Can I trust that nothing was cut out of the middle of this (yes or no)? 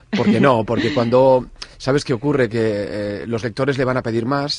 yes